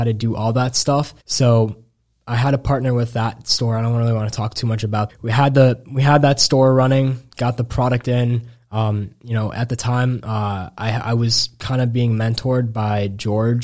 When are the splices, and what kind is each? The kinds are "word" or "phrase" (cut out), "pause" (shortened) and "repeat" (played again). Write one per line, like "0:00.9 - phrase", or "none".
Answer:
0:01.2 - pause
0:05.1 - phrase